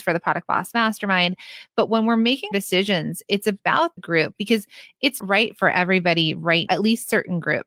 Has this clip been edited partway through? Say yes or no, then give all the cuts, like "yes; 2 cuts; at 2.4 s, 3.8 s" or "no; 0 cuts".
yes; 4 cuts; at 2.5 s, 4.0 s, 5.2 s, 6.7 s